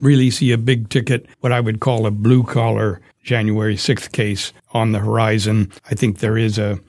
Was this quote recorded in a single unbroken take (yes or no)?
no